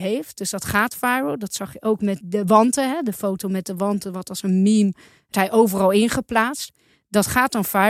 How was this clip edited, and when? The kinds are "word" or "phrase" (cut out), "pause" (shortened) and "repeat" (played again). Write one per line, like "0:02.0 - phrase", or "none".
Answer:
0:02.2 - word
0:05.3 - word